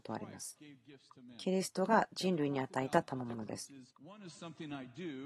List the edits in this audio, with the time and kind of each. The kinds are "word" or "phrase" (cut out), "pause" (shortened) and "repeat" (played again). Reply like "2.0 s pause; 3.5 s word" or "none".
3.9 s pause